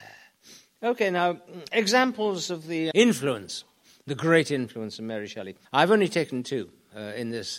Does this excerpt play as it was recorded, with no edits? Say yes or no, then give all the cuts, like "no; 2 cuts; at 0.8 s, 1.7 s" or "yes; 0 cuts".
no; 2 cuts; at 2.9 s, 5.6 s